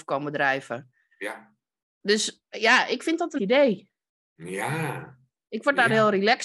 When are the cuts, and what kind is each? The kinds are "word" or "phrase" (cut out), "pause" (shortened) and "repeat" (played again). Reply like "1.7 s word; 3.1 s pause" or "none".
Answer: 3.4 s phrase

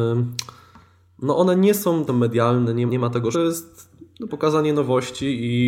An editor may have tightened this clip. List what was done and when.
2.1 s phrase; 2.9 s word; 3.3 s phrase; 4.3 s word

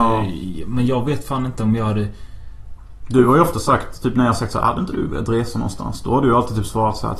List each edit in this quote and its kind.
none

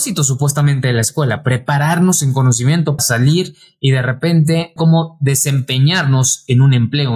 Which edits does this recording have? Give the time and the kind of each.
3.0 s word; 4.8 s word

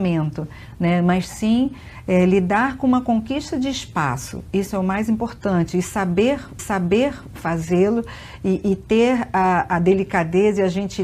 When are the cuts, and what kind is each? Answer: 6.6 s repeat

